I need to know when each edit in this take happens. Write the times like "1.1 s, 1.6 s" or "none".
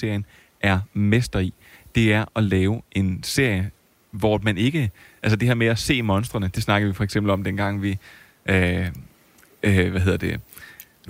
none